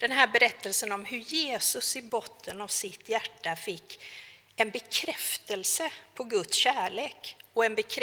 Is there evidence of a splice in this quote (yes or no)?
no